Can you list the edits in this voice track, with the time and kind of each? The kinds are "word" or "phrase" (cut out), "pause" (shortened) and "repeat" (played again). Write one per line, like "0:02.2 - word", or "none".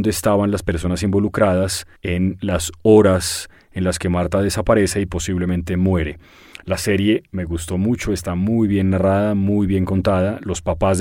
0:02.0 - pause